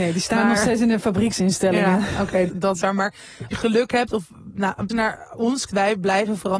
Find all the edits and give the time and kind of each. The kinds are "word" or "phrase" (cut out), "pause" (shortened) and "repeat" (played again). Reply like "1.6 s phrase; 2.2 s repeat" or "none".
2.5 s word; 2.8 s word; 3.5 s word; 4.9 s word; 5.7 s word